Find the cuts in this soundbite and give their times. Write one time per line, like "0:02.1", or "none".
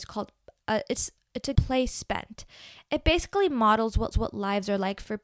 0:01.6
0:04.1